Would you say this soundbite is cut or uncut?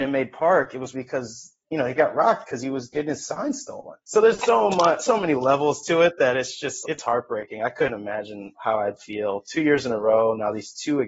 cut